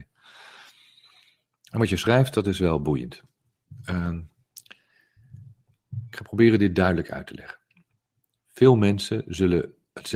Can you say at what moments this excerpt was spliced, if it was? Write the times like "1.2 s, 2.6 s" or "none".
none